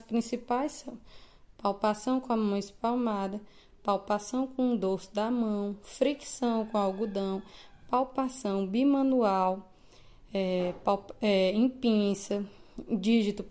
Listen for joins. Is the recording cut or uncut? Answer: uncut